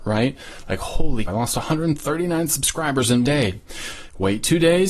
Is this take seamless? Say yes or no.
no